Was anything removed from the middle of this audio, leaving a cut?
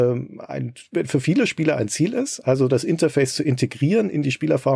no; 0 cuts

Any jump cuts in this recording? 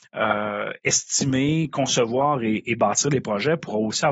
no; 0 cuts

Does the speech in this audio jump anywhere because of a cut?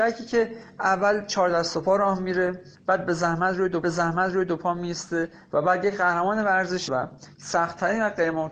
yes; 3 cuts; at 2.7 s, 3.8 s, 6.9 s

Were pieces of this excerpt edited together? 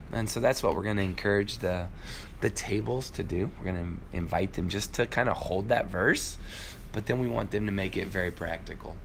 no; 0 cuts

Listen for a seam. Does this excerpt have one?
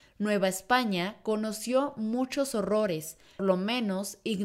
yes; 1 cut; at 3.4 s

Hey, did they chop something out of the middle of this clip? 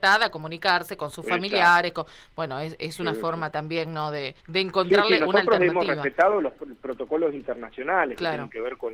yes; 1 cut; at 4.4 s

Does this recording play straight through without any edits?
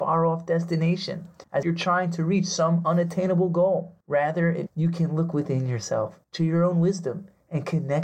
no; 4 cuts; at 1.6 s, 4.0 s, 4.7 s, 6.2 s

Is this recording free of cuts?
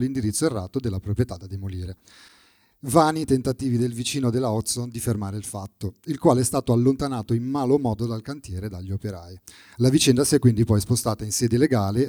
yes; 0 cuts

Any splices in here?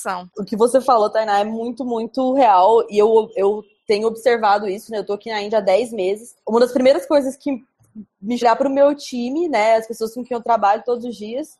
yes; 1 cut; at 8.4 s

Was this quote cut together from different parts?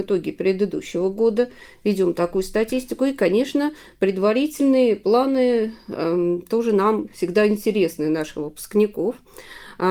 no; 0 cuts

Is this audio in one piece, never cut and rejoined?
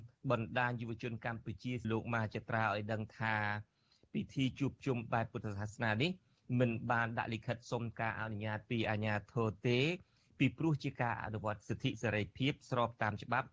no; 1 cut; at 1.8 s

